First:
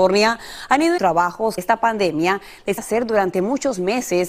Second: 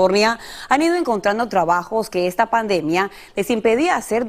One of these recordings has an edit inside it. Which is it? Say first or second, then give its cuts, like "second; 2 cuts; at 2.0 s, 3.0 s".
first; 3 cuts; at 1.0 s, 1.6 s, 2.8 s